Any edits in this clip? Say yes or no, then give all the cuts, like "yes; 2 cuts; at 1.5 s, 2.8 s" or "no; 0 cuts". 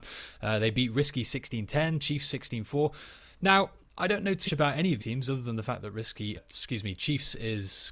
yes; 3 cuts; at 4.5 s, 5.0 s, 6.4 s